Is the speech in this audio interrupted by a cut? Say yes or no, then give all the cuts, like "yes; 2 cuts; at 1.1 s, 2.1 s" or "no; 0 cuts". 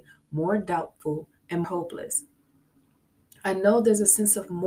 yes; 1 cut; at 1.6 s